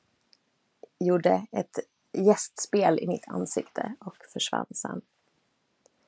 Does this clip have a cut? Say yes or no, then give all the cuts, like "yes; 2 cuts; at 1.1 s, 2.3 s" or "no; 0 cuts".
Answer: no; 0 cuts